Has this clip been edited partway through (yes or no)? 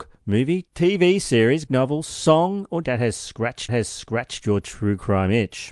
yes